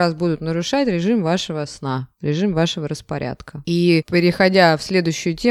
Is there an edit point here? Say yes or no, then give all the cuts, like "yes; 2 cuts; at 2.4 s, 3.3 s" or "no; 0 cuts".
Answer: no; 0 cuts